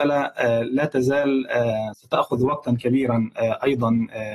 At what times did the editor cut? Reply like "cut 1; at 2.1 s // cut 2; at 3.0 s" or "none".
none